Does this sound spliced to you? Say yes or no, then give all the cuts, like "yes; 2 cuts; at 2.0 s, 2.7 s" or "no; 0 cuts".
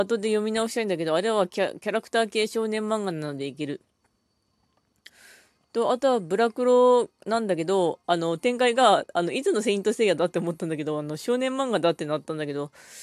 no; 0 cuts